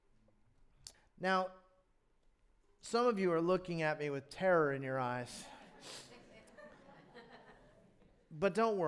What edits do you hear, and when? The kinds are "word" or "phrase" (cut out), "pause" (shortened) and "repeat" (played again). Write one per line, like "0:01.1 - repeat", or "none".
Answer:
0:00.9 - pause
0:06.7 - pause